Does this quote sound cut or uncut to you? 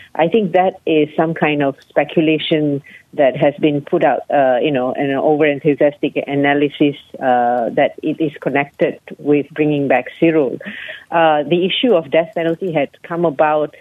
uncut